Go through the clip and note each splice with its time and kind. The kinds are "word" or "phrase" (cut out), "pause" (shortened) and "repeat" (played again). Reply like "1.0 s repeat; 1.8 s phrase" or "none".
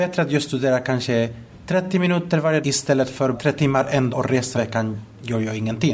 2.6 s word; 3.3 s word; 4.1 s word; 4.5 s word